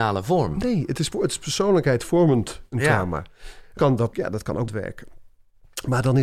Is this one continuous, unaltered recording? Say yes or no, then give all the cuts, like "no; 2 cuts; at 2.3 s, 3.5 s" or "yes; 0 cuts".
no; 4 cuts; at 1.1 s, 3.8 s, 4.1 s, 4.7 s